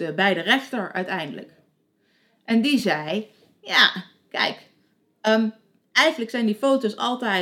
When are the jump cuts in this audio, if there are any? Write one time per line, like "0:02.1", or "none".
none